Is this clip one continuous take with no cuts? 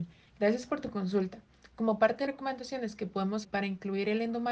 no; 2 cuts; at 2.3 s, 3.4 s

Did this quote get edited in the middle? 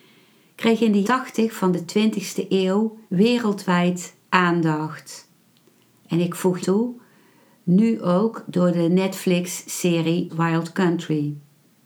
yes; 4 cuts; at 1.0 s, 3.1 s, 6.6 s, 10.3 s

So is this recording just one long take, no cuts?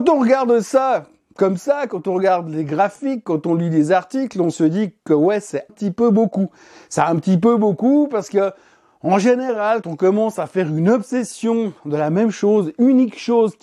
no; 2 cuts; at 5.7 s, 9.8 s

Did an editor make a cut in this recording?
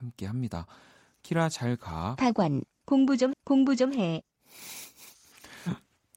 yes; 1 cut; at 3.3 s

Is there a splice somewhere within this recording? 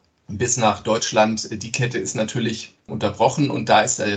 no; 0 cuts

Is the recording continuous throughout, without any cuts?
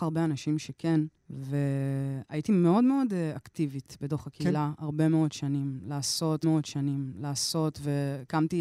no; 2 cuts; at 1.2 s, 6.4 s

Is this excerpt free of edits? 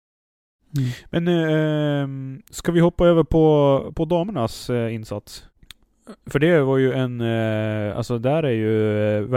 yes; 0 cuts

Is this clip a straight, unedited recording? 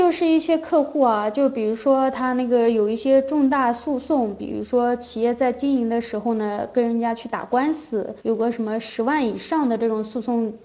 no; 1 cut; at 8.2 s

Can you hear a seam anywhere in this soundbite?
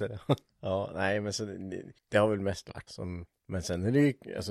yes; 2 cuts; at 2.0 s, 2.9 s

